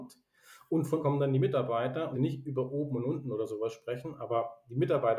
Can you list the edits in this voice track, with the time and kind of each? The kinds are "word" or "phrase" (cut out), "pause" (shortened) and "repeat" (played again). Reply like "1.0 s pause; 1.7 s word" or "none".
1.0 s word; 2.1 s phrase